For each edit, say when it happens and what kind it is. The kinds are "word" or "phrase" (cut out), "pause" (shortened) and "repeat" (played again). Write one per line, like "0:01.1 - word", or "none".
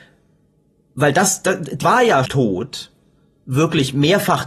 0:01.8 - word
0:02.3 - word